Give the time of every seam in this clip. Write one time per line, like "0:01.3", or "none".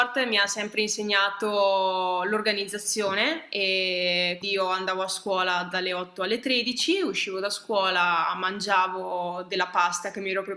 0:04.4